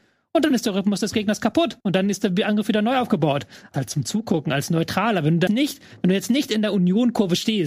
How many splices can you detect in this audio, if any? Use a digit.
3